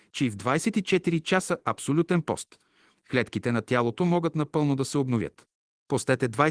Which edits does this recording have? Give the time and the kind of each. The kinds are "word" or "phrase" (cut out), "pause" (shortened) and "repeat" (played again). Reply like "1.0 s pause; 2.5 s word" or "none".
none